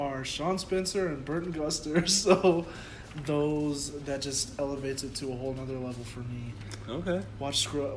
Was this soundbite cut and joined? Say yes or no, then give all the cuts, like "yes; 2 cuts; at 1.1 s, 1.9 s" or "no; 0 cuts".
no; 0 cuts